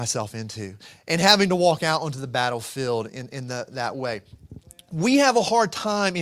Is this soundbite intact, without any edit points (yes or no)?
yes